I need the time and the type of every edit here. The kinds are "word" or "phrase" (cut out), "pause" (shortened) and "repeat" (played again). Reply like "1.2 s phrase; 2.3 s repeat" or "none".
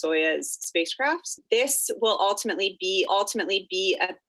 3.1 s repeat